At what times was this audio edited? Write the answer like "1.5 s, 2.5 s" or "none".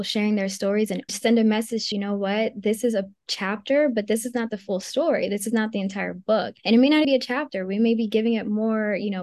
1.1 s, 1.9 s, 6.6 s, 7.0 s